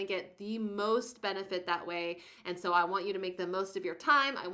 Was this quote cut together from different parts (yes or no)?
no